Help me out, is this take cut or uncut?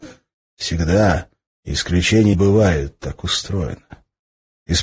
cut